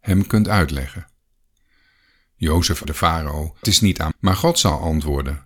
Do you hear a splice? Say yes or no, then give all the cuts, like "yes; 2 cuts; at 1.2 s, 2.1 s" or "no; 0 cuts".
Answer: yes; 3 cuts; at 2.8 s, 3.6 s, 4.1 s